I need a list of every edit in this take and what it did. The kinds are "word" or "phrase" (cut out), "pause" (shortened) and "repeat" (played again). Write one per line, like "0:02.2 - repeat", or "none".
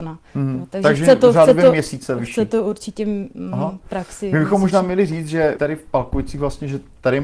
0:05.6 - word